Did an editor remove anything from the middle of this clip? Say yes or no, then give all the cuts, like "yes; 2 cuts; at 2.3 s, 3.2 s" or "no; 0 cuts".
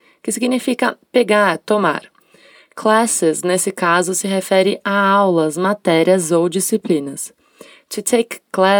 no; 0 cuts